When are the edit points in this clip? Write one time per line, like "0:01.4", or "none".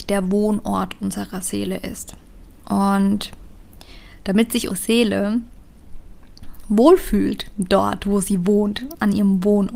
0:04.7